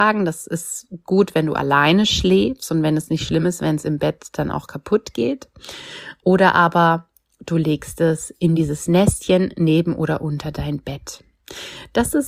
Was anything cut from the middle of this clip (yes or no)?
no